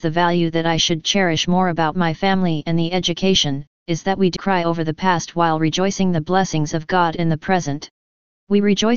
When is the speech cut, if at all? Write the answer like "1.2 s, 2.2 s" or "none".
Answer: 4.4 s